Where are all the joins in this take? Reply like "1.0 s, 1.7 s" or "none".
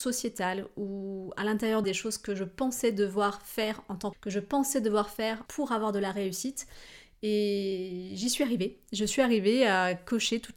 1.8 s, 4.1 s, 5.5 s